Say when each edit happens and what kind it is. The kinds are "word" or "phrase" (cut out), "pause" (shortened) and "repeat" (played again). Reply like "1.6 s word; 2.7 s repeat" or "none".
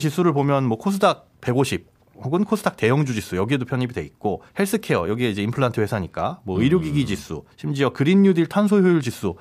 2.0 s pause; 4.5 s pause; 7.5 s pause